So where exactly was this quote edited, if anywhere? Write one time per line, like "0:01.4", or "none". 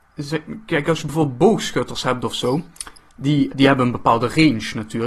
0:03.5